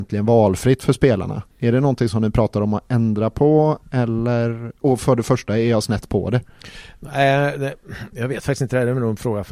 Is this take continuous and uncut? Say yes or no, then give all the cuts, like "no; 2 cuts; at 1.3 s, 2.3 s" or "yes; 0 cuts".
no; 2 cuts; at 1.5 s, 4.8 s